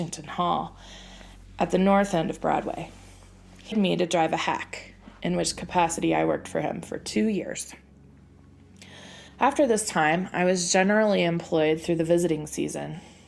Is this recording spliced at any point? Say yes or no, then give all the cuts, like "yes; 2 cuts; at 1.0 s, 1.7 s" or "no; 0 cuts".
yes; 2 cuts; at 3.7 s, 9.3 s